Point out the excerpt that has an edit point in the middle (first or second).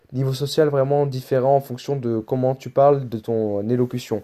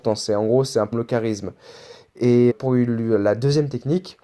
second